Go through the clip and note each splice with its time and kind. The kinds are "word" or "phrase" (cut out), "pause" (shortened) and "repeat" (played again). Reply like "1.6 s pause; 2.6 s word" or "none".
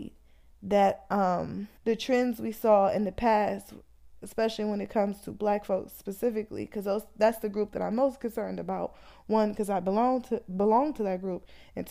1.8 s pause